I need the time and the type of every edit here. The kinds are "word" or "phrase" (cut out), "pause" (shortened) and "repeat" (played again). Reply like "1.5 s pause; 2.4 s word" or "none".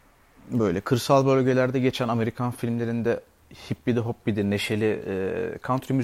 none